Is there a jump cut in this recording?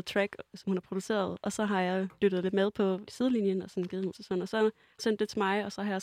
yes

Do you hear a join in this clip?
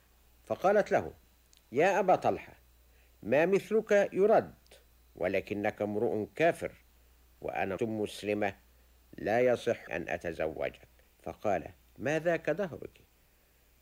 yes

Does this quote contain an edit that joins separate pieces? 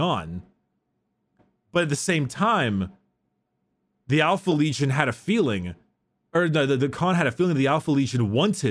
no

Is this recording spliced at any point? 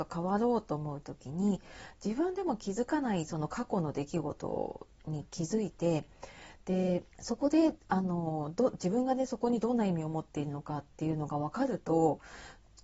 yes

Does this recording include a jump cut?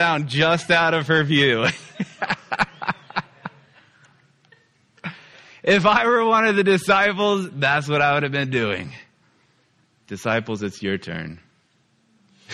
yes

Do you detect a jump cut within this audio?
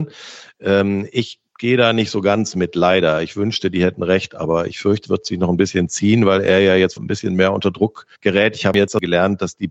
yes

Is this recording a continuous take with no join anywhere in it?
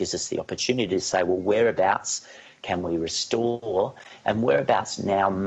yes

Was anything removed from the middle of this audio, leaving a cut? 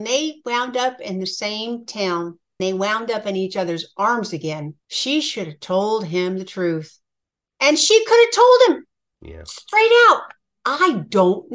yes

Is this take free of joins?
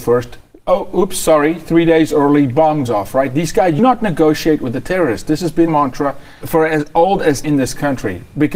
no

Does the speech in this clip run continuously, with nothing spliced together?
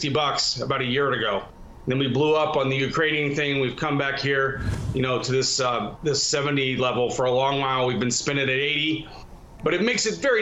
yes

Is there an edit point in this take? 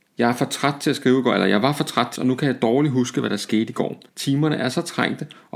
yes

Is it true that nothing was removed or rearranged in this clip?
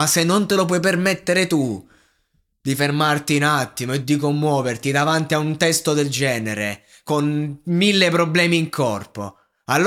yes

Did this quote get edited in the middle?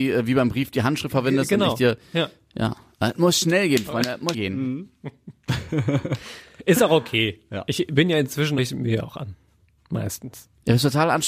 yes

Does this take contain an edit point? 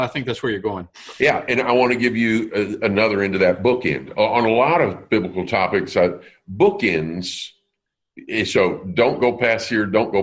no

